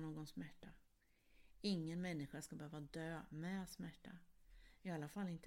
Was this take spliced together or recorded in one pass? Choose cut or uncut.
uncut